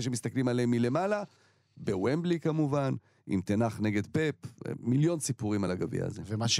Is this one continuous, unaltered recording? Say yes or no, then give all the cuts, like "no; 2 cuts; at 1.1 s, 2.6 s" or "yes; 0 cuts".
yes; 0 cuts